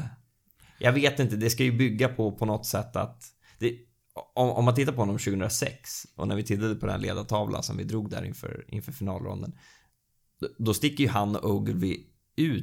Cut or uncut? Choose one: uncut